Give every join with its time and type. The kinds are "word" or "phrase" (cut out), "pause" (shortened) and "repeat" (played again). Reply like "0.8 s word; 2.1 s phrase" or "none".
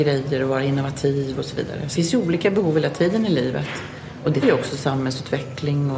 1.9 s word; 4.4 s word